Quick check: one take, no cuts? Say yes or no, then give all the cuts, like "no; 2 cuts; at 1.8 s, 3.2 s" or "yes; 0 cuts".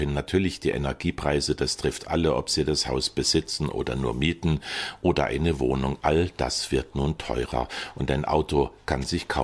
yes; 0 cuts